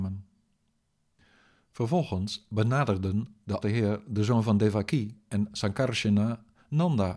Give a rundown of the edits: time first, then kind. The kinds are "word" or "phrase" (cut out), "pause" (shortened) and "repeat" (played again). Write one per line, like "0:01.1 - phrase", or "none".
0:03.6 - word